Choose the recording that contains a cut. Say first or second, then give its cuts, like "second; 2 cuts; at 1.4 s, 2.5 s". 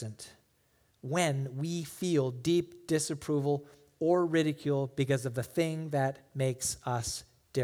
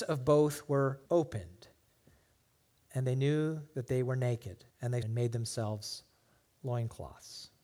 second; 3 cuts; at 1.1 s, 4.7 s, 5.0 s